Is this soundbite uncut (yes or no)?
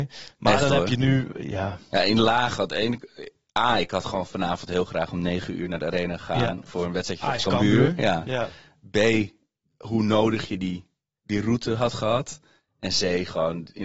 yes